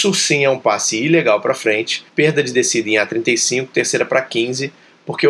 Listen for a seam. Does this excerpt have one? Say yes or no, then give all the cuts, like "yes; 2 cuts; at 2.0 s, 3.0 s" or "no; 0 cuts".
yes; 1 cut; at 2.1 s